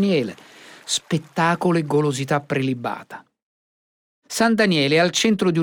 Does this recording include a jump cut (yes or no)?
no